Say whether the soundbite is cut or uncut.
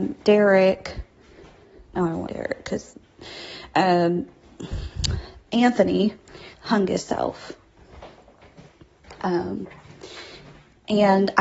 cut